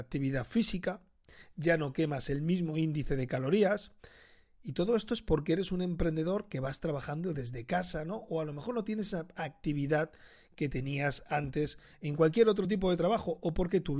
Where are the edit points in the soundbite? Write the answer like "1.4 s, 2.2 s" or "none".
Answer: none